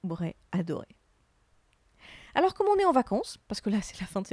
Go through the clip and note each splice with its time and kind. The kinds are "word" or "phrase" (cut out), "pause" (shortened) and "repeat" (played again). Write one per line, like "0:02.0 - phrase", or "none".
none